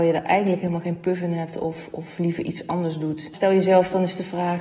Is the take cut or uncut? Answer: uncut